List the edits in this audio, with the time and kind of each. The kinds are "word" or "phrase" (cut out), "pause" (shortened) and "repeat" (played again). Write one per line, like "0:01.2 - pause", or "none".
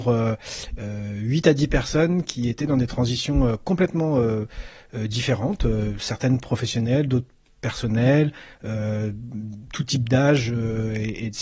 none